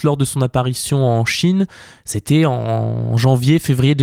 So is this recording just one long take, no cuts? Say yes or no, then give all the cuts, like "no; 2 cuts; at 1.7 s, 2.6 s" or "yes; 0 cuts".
yes; 0 cuts